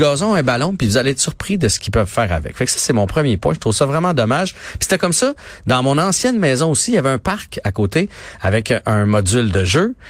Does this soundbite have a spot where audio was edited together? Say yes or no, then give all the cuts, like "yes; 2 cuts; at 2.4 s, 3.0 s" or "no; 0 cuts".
no; 0 cuts